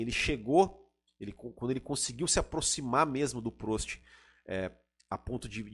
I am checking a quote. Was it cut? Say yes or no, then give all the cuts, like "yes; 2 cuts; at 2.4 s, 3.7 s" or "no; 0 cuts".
no; 0 cuts